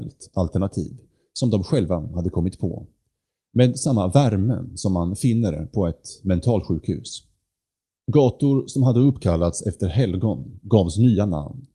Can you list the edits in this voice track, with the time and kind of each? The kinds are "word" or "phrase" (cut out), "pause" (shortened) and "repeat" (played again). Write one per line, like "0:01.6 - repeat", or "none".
none